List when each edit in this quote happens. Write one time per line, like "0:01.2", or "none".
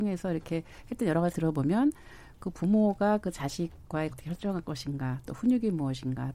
0:01.3
0:04.1